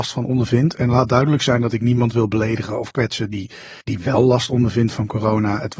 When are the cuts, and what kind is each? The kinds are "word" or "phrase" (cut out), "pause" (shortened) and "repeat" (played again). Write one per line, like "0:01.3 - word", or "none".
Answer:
0:03.8 - pause